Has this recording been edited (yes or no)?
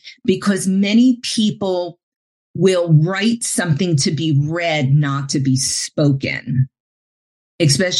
no